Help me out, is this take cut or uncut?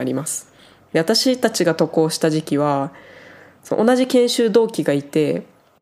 uncut